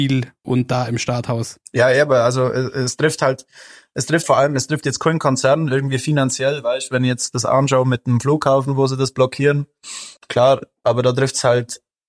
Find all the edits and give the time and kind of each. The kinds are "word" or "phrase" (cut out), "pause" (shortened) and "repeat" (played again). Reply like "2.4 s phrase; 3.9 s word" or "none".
4.2 s word; 10.2 s pause